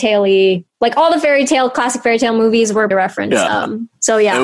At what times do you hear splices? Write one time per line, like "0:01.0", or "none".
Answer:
0:02.9

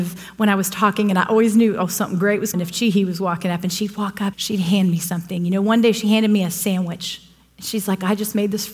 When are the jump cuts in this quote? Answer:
0:02.5
0:04.3

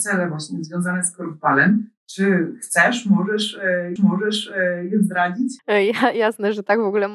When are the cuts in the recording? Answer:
0:02.0
0:04.0
0:05.6

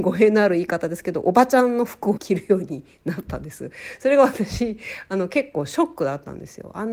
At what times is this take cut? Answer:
0:02.2

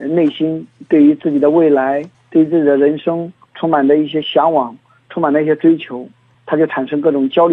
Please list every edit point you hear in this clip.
none

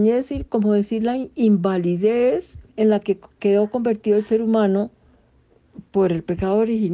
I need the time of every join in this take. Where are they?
0:02.7

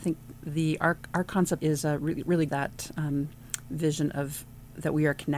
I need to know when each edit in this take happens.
0:01.6
0:02.5

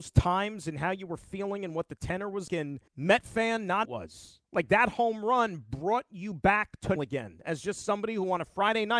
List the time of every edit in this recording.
0:02.5
0:02.9
0:03.8
0:04.4
0:07.0

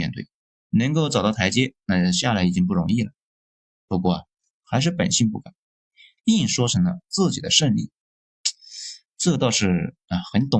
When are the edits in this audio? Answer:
none

